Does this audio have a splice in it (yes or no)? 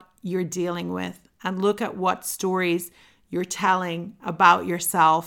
no